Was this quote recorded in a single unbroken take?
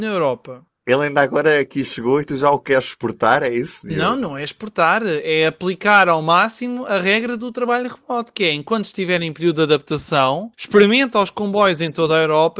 no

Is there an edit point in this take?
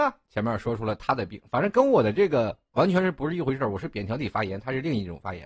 no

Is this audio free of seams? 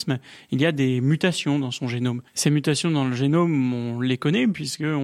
no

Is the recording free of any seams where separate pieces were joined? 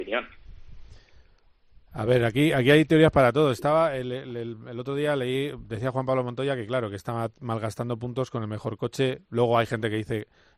yes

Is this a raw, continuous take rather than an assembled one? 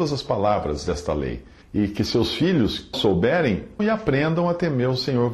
no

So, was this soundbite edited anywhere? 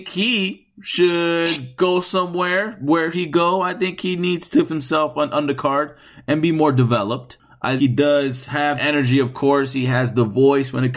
yes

